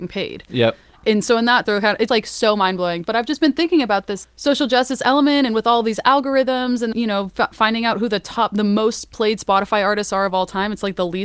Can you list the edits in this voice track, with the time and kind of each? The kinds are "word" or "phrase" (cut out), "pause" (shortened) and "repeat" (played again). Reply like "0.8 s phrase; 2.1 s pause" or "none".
1.6 s word; 2.1 s word; 4.2 s word; 6.9 s word